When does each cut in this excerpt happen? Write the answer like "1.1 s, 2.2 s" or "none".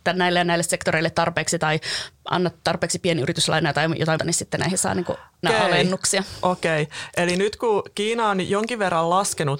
4.2 s, 5.4 s

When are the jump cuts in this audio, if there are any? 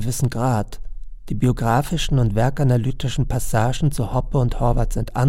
none

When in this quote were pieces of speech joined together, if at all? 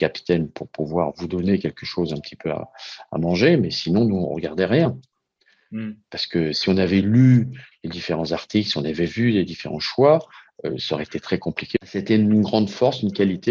none

